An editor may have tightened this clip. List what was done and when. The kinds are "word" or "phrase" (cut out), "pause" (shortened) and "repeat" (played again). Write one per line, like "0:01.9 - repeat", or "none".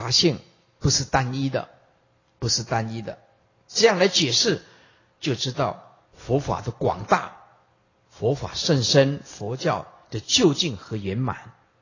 0:06.0 - pause